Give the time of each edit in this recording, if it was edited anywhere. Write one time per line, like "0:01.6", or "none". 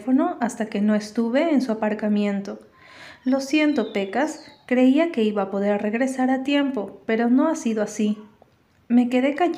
none